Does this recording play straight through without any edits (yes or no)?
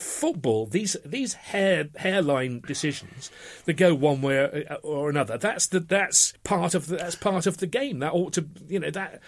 no